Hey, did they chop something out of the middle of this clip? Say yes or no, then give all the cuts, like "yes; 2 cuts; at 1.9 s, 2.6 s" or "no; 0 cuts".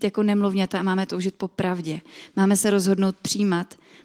no; 0 cuts